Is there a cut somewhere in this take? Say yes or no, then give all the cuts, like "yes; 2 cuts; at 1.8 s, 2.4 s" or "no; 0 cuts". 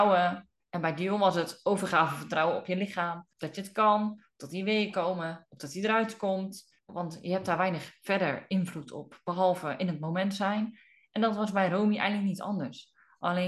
yes; 1 cut; at 3.3 s